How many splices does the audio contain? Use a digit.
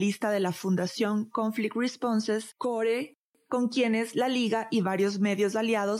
0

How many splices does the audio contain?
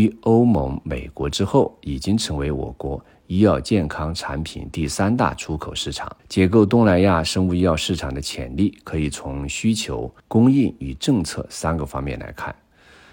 2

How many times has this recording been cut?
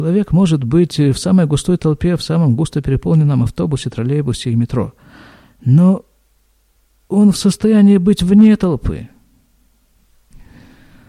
0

